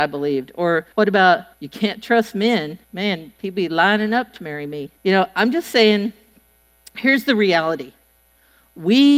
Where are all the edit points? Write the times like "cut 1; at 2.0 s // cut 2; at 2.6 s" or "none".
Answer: cut 1; at 0.9 s // cut 2; at 1.5 s // cut 3; at 2.8 s // cut 4; at 5.0 s